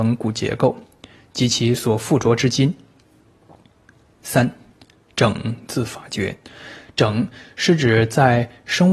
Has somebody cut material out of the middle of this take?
no; 0 cuts

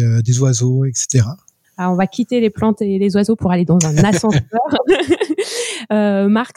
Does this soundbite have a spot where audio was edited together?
yes; 1 cut; at 1.6 s

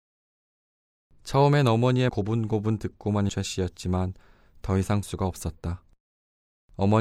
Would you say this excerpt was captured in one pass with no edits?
no; 3 cuts; at 2.1 s, 3.3 s, 5.0 s

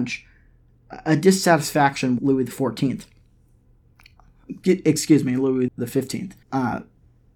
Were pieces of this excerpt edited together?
yes; 3 cuts; at 2.2 s, 5.7 s, 6.4 s

